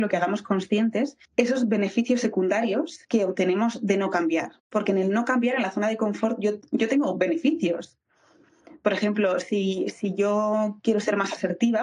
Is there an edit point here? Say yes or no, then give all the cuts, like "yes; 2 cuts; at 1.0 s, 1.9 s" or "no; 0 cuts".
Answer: yes; 3 cuts; at 1.2 s, 3.0 s, 4.6 s